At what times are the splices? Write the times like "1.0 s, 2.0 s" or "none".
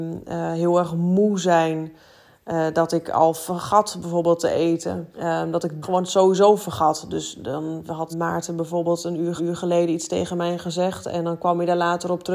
5.1 s, 5.8 s, 8.1 s, 9.4 s